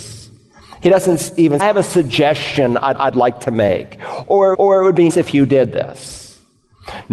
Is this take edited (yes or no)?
yes